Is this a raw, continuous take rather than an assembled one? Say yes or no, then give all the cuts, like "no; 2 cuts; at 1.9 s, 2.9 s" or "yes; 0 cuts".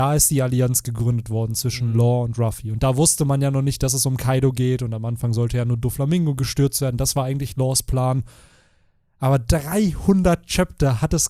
yes; 0 cuts